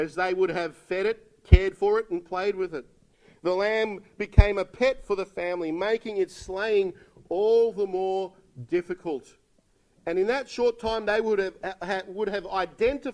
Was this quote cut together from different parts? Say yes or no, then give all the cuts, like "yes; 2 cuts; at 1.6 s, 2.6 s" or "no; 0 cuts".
no; 0 cuts